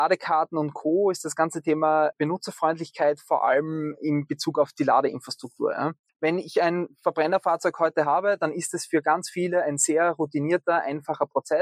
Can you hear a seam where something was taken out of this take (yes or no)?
yes